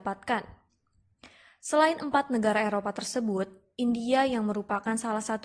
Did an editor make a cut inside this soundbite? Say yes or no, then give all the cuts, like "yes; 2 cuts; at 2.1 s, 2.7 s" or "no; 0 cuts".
no; 0 cuts